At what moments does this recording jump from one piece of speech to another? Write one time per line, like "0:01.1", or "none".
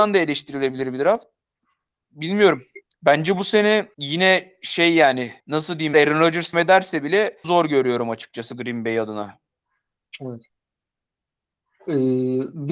0:02.9
0:03.9
0:05.4
0:05.9
0:06.5
0:07.4